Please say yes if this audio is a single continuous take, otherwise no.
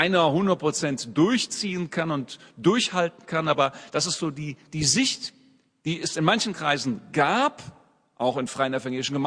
yes